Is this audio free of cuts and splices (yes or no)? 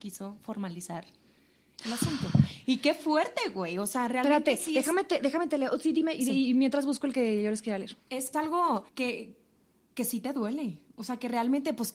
no